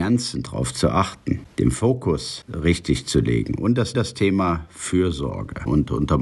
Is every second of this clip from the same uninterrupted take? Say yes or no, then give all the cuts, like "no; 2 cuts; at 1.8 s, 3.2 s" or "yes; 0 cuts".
no; 1 cut; at 3.9 s